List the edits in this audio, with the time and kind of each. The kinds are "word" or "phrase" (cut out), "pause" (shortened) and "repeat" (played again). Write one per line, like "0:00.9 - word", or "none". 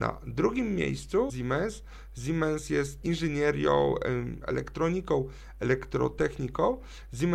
0:01.3 - word
0:03.0 - phrase